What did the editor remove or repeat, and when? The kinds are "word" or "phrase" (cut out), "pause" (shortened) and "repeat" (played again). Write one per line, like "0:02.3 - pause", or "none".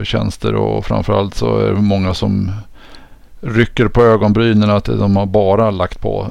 none